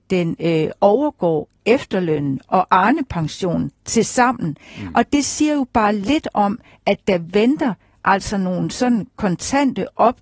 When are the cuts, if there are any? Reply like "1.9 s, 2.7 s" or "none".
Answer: none